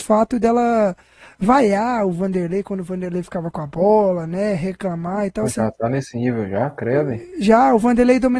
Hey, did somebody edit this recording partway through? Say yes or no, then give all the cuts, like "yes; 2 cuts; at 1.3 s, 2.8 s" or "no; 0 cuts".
no; 0 cuts